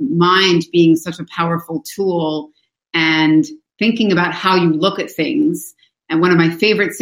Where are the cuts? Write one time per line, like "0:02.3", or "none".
none

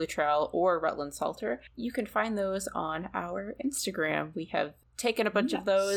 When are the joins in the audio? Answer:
none

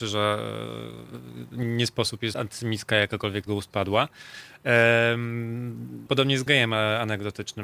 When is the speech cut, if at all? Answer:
0:01.6
0:02.3
0:03.5
0:06.1
0:06.5

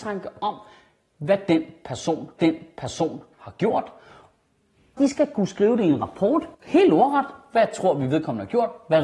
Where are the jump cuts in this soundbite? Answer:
0:02.4
0:05.0
0:06.5

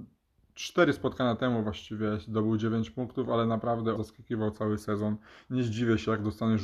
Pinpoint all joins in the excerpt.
0:04.0

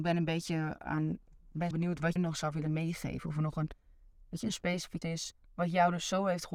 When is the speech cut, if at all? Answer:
0:01.7
0:02.2
0:05.0

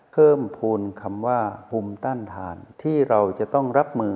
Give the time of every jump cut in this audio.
0:02.7

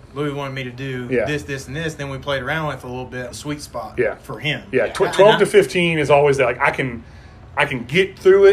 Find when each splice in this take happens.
0:03.3

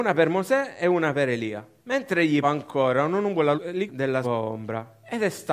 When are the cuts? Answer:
0:01.8
0:02.4
0:03.6
0:03.9
0:04.2

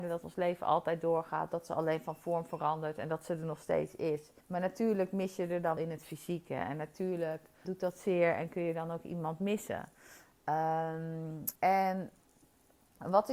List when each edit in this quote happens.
0:04.4
0:05.8
0:07.6
0:11.6

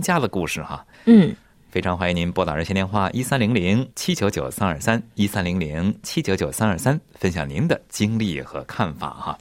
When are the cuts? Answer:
0:00.9
0:03.9

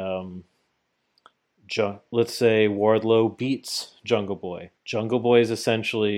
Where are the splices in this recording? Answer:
0:04.8

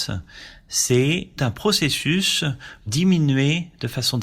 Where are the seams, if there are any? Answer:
0:01.4
0:02.9

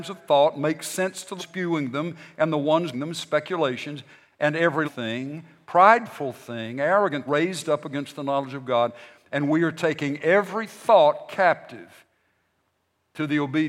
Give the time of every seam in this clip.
0:01.4
0:02.9
0:04.8
0:07.3

